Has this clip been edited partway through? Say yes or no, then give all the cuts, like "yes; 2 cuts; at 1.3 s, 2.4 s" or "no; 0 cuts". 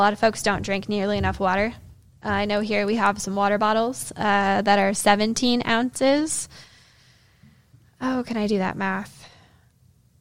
no; 0 cuts